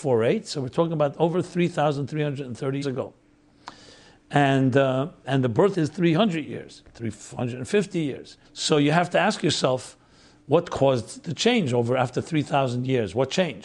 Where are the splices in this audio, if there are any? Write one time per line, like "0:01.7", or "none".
0:02.8
0:05.2
0:05.7
0:08.4